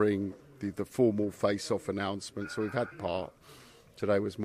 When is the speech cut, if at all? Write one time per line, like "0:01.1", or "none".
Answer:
0:02.9